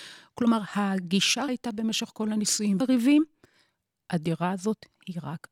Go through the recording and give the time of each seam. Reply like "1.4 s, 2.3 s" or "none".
1.5 s, 2.8 s

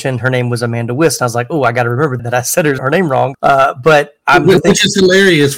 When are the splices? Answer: 2.2 s, 2.8 s, 3.3 s, 4.6 s

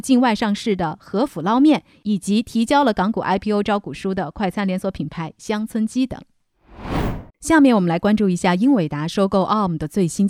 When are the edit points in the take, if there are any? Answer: 7.3 s

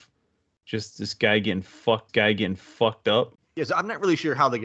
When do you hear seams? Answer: 2.1 s

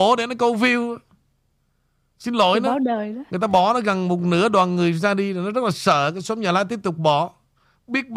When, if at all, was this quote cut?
none

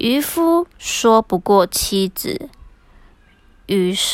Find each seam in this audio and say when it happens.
none

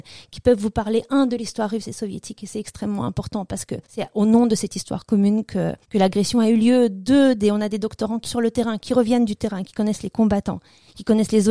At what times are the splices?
3.8 s, 5.8 s, 8.2 s

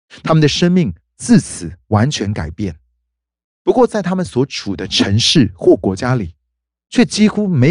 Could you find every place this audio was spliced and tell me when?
1.8 s

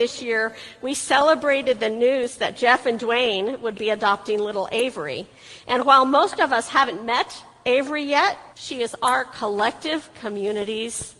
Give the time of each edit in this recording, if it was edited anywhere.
8.5 s

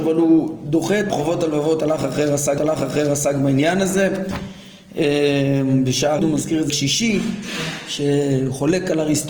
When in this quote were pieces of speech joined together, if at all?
1.1 s, 2.6 s, 6.2 s, 6.7 s

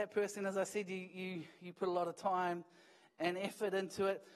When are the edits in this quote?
none

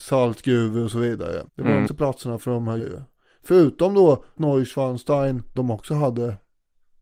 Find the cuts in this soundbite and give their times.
1.5 s, 1.9 s, 2.8 s, 4.4 s, 5.6 s

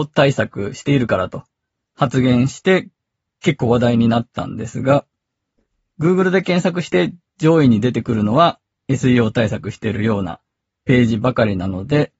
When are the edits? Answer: none

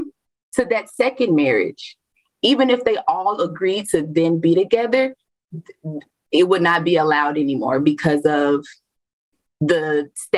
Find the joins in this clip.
none

